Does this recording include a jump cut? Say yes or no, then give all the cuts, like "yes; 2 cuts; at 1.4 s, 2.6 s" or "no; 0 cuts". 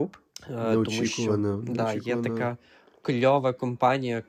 no; 0 cuts